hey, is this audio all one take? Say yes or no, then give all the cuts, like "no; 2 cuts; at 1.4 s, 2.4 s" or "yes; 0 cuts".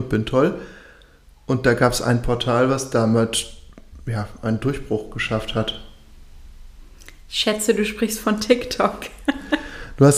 yes; 0 cuts